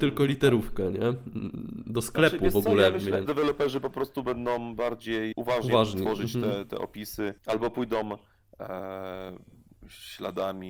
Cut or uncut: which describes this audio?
cut